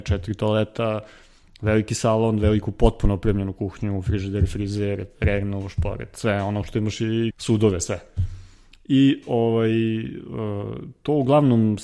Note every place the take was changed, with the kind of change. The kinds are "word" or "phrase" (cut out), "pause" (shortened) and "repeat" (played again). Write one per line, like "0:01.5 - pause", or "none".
0:07.3 - word